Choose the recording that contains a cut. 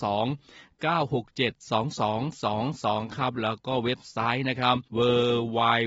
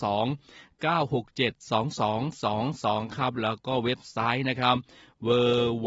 first; 1 cut; at 4.9 s

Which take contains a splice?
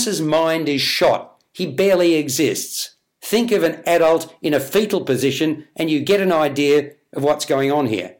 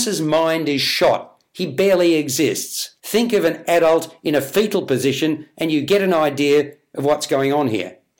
second; 1 cut; at 3.0 s

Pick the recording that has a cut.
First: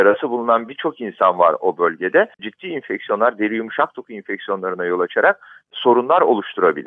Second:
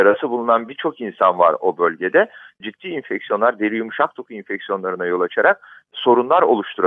first; 1 cut; at 2.3 s

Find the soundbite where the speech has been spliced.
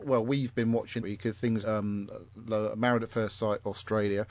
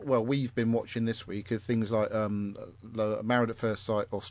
first; 2 cuts; at 1.0 s, 1.6 s

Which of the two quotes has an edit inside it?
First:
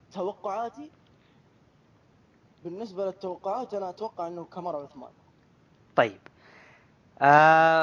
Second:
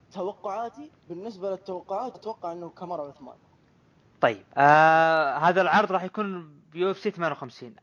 second; 3 cuts; at 1.0 s, 2.1 s, 4.5 s

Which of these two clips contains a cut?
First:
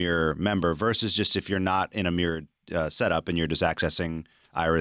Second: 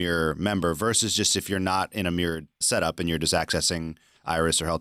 second; 1 cut; at 2.6 s

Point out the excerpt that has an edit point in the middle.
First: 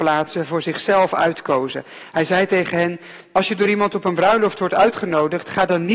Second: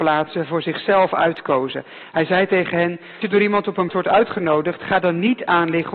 second; 2 cuts; at 3.2 s, 3.9 s

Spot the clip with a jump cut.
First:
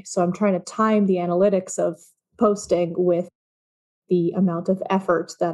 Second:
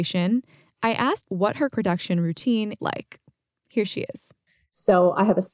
second; 3 cuts; at 1.2 s, 1.7 s, 2.8 s

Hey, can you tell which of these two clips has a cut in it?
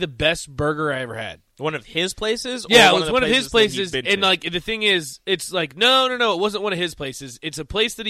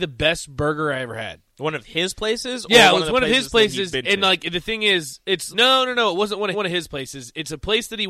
second; 2 cuts; at 5.5 s, 6.5 s

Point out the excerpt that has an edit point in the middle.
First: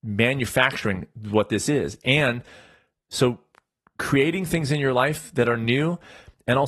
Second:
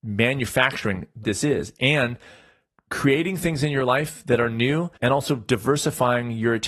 second; 3 cuts; at 1.2 s, 2.8 s, 5.0 s

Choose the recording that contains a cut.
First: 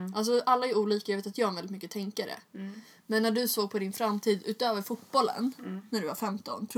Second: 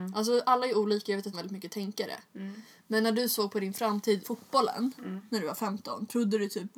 second; 2 cuts; at 1.3 s, 4.2 s

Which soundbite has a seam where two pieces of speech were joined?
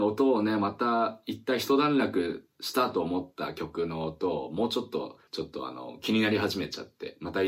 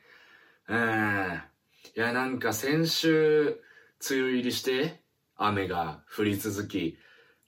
first; 1 cut; at 5.3 s

